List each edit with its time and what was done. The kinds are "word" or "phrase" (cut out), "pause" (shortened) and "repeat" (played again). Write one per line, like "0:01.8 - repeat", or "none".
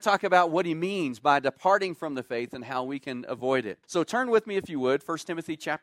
0:03.8 - pause